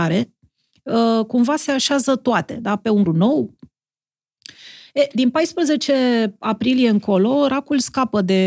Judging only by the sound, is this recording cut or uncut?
cut